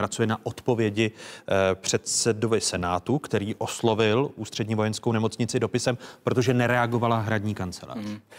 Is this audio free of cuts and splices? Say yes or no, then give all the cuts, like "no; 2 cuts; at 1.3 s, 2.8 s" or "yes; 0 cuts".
yes; 0 cuts